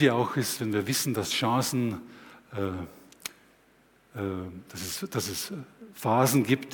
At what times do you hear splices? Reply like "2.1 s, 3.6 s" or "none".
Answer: none